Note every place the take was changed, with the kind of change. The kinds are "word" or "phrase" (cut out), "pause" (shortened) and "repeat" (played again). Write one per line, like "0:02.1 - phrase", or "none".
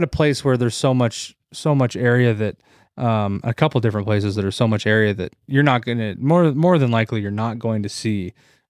none

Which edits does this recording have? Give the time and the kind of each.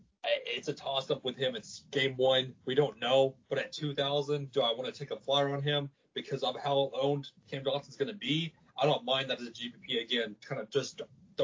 none

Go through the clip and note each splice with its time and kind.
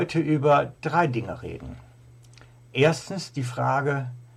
none

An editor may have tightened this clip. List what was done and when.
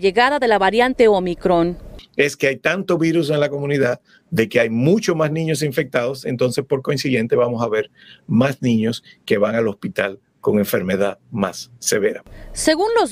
none

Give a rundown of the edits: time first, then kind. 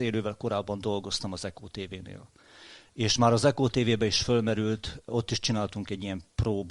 none

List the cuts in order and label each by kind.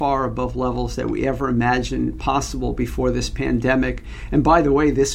none

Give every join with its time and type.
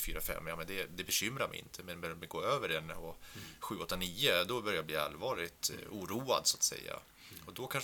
none

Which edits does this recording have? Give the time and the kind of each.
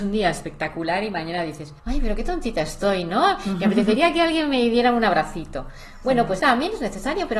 0:01.8 - pause
0:06.4 - word

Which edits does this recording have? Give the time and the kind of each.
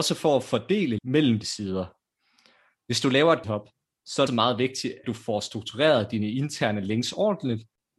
0:01.0 - word
0:01.4 - word
0:03.4 - word
0:04.3 - word
0:05.0 - word

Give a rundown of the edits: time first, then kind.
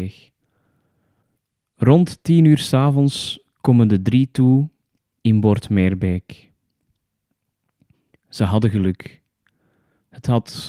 none

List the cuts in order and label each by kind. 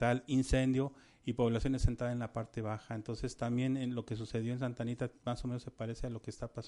none

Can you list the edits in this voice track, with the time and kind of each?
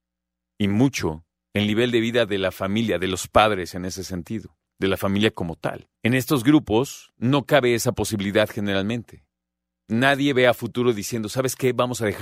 0:01.4 - pause
0:05.9 - pause

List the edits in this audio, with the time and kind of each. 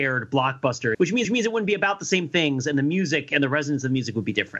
0:00.9 - word
0:01.2 - repeat

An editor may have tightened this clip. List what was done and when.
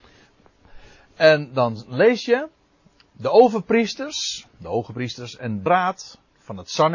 0:05.7 - word

